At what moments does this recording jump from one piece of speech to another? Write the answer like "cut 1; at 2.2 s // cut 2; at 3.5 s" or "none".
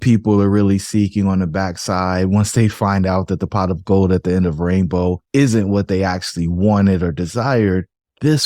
cut 1; at 5.2 s